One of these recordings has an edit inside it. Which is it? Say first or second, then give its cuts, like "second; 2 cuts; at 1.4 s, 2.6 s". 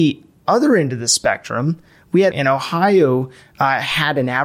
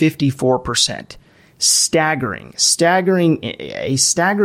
first; 1 cut; at 2.3 s